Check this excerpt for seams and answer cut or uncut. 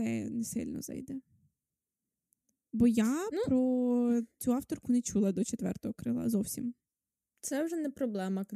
uncut